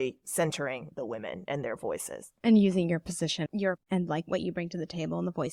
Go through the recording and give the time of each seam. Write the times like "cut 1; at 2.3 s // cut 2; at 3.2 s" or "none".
cut 1; at 3.5 s // cut 2; at 3.8 s